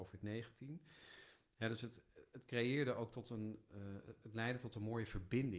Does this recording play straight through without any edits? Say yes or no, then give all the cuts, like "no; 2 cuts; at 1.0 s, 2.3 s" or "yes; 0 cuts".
yes; 0 cuts